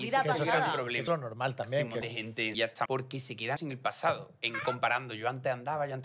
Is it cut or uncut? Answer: cut